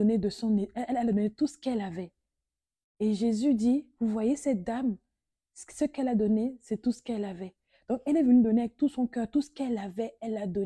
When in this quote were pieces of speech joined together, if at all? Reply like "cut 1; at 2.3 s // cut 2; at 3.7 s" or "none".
none